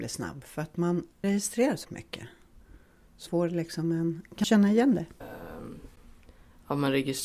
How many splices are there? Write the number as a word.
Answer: four